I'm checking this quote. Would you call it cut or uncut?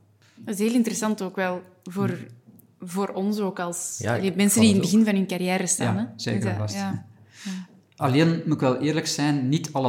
uncut